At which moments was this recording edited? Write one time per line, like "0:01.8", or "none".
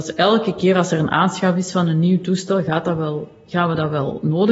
none